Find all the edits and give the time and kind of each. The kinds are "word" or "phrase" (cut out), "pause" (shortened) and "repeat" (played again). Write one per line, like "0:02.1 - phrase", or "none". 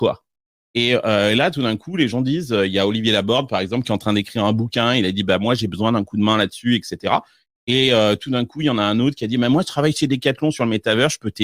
none